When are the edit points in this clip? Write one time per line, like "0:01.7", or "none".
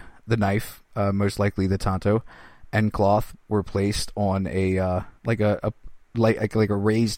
0:05.2
0:06.0